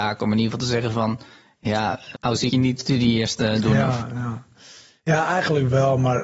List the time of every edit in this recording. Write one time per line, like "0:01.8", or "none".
0:02.1
0:02.5
0:02.8